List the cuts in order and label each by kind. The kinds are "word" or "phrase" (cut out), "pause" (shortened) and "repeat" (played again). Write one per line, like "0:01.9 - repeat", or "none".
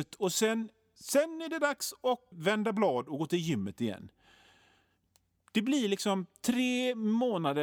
0:02.3 - word